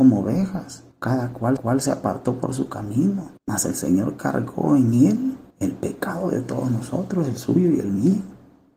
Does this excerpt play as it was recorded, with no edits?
no; 4 cuts; at 0.9 s, 1.6 s, 3.4 s, 5.5 s

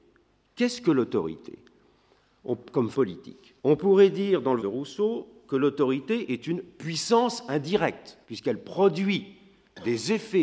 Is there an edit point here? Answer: yes; 4 cuts; at 2.9 s, 3.6 s, 4.6 s, 8.2 s

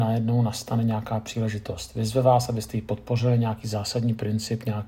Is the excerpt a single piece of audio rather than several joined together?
yes; 0 cuts

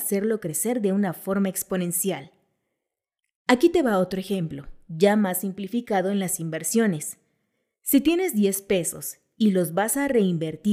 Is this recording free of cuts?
yes; 0 cuts

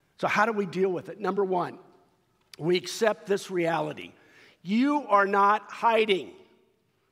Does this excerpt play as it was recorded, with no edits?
yes; 0 cuts

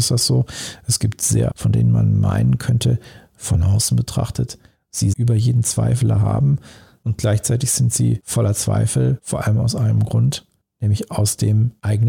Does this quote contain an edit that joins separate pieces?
yes; 2 cuts; at 1.5 s, 5.1 s

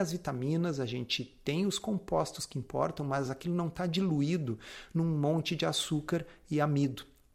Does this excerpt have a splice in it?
no; 0 cuts

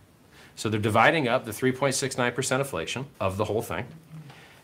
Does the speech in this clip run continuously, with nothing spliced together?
no; 1 cut; at 3.1 s

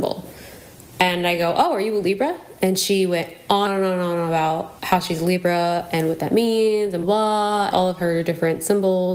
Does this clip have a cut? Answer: yes; 4 cuts; at 3.7 s, 4.8 s, 7.0 s, 7.7 s

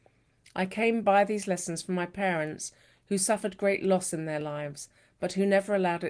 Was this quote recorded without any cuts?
yes; 0 cuts

